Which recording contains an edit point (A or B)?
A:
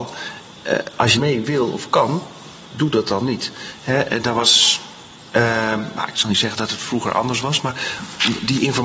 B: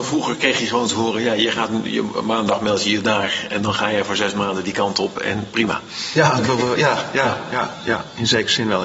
A